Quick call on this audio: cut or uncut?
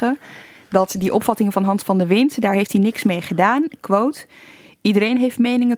uncut